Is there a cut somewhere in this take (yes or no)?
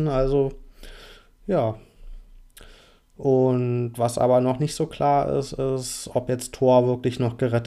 no